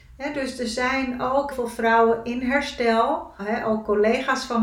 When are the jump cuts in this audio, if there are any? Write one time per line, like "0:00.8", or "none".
0:01.5
0:03.4

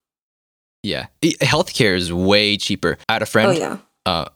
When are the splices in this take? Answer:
0:03.0

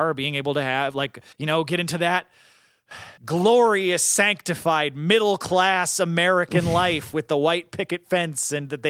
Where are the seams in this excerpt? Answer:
0:01.3
0:03.2

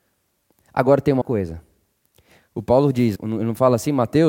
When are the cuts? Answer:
0:01.2
0:03.2

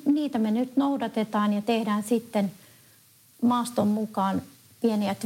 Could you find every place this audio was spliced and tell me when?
none

